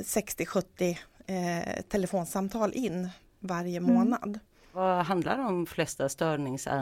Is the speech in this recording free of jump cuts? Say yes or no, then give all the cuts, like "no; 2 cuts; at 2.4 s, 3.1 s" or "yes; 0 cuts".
yes; 0 cuts